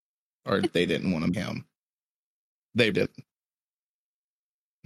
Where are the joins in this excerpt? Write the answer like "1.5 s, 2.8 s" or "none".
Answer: 1.3 s, 2.9 s